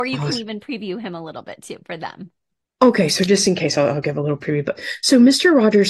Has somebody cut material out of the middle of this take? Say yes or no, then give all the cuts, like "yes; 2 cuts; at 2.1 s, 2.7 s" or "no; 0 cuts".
no; 0 cuts